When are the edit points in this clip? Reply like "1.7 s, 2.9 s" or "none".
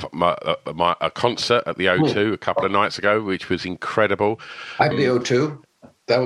4.9 s